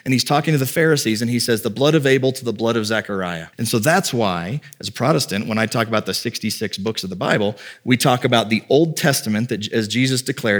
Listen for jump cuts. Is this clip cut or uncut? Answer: cut